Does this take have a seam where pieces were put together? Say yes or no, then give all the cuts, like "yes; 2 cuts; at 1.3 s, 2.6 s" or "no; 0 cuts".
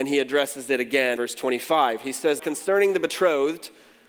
yes; 2 cuts; at 1.2 s, 2.4 s